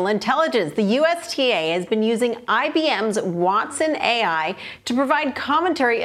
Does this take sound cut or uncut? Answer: uncut